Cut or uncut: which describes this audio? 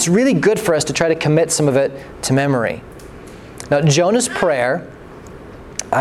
uncut